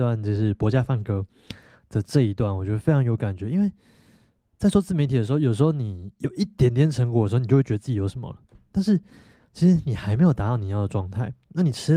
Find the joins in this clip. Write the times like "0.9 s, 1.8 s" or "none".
none